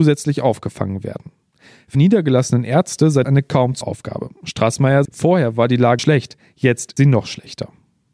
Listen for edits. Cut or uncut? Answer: cut